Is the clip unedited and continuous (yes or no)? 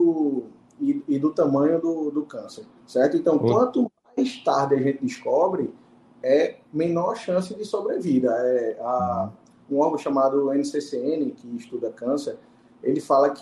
yes